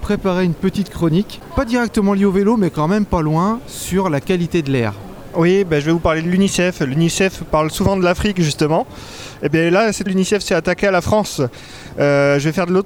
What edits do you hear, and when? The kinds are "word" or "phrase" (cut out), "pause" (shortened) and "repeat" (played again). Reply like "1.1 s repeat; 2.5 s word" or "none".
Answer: 10.1 s word